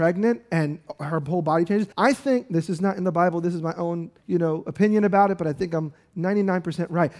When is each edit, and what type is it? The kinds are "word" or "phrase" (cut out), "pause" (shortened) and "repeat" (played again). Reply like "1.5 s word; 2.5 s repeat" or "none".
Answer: 1.9 s pause; 4.2 s pause